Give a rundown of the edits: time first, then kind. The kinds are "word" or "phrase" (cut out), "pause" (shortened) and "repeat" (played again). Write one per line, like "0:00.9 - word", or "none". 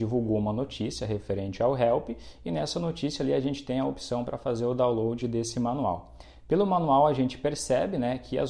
none